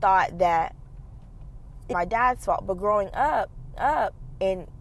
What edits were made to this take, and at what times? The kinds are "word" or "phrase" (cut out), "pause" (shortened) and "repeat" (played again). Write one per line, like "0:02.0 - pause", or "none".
0:01.9 - word
0:03.7 - repeat